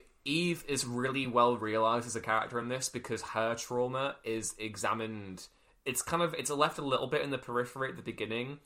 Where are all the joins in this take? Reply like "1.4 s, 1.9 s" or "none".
none